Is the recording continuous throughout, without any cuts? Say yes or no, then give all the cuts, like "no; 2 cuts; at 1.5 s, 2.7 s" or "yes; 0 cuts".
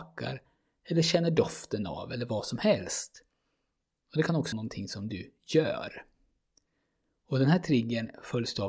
no; 1 cut; at 4.5 s